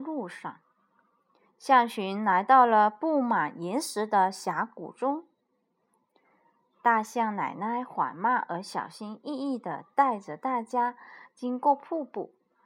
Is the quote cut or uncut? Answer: uncut